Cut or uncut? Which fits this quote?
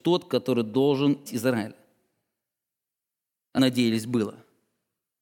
cut